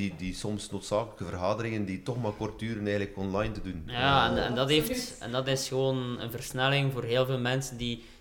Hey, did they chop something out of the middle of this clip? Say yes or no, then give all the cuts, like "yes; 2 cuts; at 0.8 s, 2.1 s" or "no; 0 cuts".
no; 0 cuts